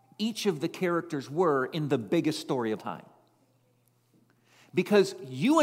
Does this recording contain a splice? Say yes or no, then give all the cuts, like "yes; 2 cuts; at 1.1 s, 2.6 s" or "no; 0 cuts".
yes; 1 cut; at 2.8 s